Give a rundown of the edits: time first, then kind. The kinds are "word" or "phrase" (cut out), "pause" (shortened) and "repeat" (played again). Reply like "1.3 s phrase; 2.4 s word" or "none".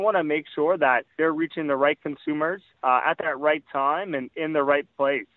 1.1 s pause; 2.7 s pause

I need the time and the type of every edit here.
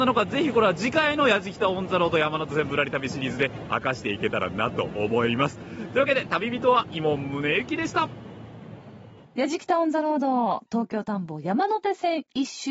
9.2 s pause

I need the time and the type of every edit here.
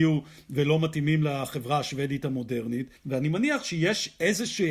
3.0 s pause

